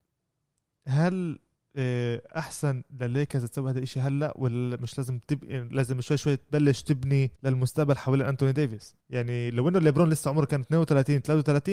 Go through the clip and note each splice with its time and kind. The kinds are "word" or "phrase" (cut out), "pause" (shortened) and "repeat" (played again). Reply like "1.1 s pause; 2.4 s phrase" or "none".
7.4 s pause; 9.0 s pause

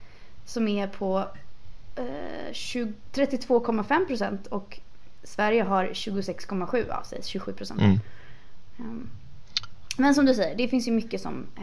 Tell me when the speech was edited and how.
none

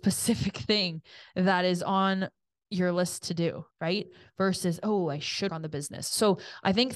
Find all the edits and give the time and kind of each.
3.7 s pause; 5.5 s word

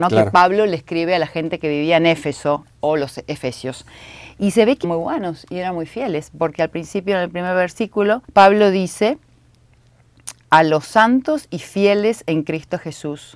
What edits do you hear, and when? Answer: 4.8 s phrase; 8.2 s pause

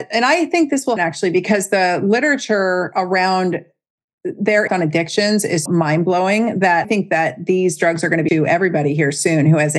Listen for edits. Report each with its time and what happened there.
1.0 s word; 4.7 s word; 5.7 s word; 6.8 s word; 8.3 s word

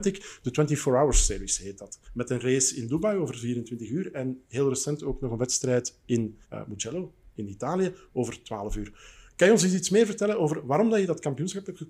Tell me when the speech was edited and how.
2.0 s pause; 6.4 s pause

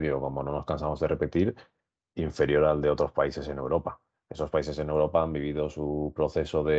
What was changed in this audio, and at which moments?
none

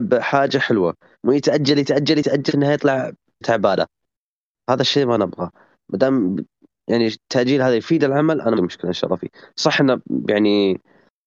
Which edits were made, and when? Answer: 1.1 s pause; 2.5 s word; 3.4 s word; 8.5 s phrase

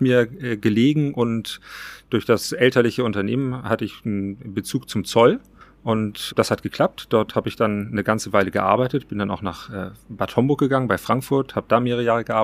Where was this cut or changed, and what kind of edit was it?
6.3 s word

